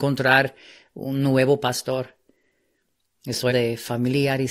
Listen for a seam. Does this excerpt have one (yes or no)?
yes